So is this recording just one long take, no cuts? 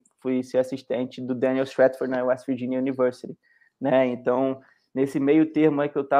yes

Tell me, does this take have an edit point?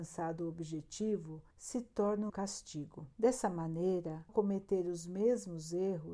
yes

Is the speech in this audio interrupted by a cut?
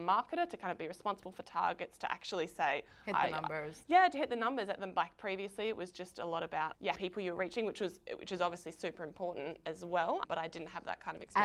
yes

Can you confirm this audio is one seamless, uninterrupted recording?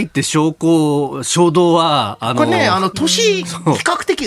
yes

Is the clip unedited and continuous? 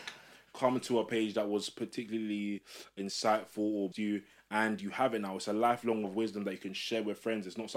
no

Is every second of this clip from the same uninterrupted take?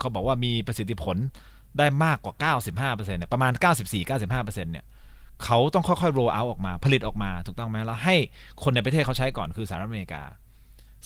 yes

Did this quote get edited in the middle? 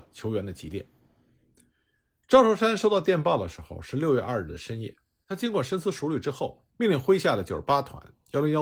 yes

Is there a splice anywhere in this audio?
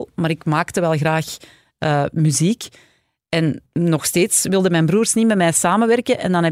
yes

